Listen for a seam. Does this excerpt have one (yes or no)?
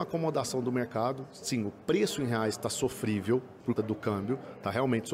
yes